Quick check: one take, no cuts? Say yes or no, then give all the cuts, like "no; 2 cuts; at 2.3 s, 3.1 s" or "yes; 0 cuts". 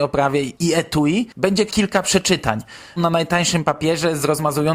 no; 2 cuts; at 1.7 s, 3.0 s